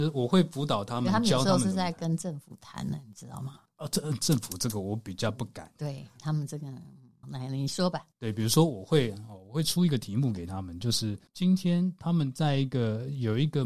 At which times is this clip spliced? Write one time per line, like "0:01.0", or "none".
0:07.2
0:08.1
0:11.3